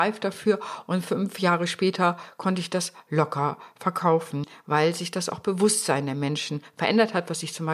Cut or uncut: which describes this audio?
uncut